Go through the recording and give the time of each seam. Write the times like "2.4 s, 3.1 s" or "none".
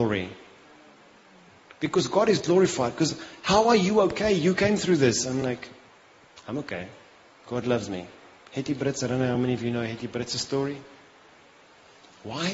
none